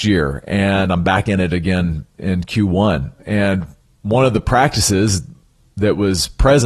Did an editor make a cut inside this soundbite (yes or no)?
no